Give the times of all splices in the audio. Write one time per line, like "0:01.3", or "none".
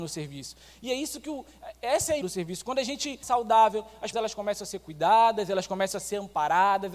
0:02.2
0:03.2
0:04.1